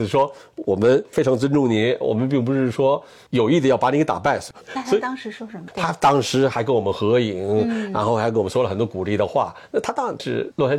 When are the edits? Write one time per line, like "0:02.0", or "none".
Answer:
none